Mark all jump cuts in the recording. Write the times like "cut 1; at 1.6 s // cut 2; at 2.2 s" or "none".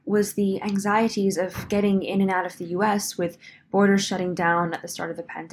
none